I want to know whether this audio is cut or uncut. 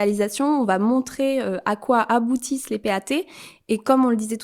uncut